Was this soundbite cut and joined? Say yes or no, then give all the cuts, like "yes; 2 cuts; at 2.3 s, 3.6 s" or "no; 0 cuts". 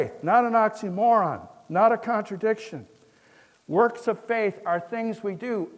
no; 0 cuts